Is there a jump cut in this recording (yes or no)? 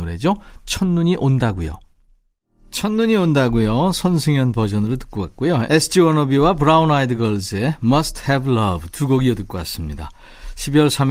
no